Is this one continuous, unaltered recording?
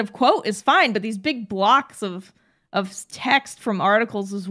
yes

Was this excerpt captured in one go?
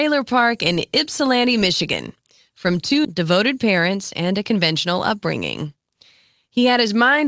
no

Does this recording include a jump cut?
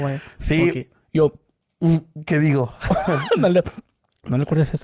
no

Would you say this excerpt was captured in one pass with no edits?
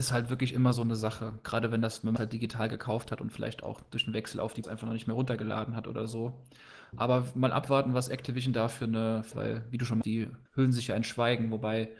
no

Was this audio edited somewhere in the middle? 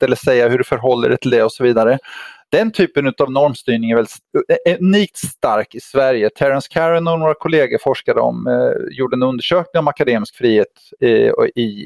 no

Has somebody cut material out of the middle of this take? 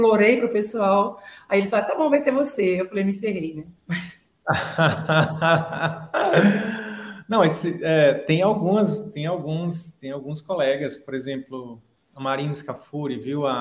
yes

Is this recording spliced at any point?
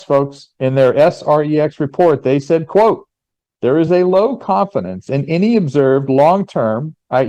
no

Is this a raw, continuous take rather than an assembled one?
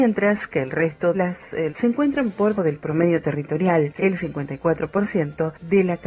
no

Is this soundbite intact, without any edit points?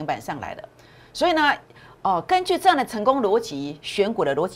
yes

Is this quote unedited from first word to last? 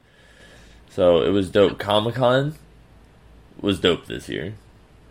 yes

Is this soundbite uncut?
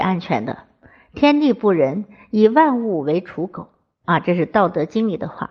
yes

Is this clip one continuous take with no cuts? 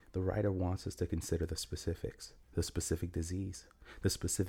no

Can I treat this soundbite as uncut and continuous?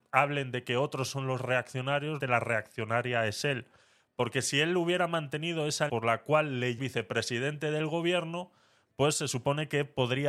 no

